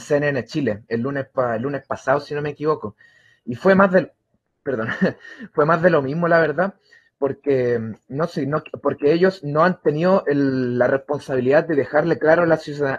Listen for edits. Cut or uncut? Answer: uncut